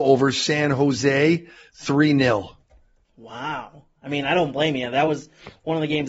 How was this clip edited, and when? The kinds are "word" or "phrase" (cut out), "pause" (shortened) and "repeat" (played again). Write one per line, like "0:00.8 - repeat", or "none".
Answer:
none